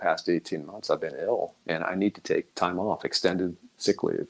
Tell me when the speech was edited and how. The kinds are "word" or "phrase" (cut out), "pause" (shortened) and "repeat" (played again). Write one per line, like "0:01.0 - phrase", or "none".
0:02.5 - pause